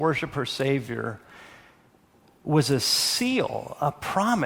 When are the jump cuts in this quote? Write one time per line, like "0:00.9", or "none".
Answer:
none